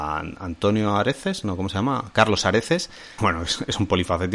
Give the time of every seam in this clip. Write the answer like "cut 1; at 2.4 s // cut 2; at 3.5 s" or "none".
cut 1; at 3.2 s